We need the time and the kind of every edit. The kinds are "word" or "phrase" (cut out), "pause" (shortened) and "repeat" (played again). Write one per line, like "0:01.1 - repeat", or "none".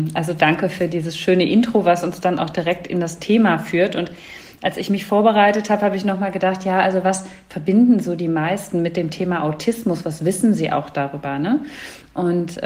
none